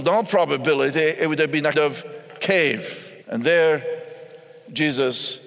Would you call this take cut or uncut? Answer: cut